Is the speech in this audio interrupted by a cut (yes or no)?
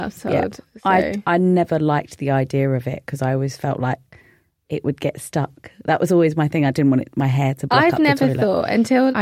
no